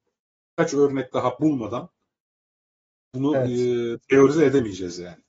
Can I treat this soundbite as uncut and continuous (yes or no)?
yes